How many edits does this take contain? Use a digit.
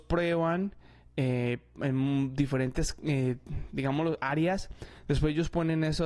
0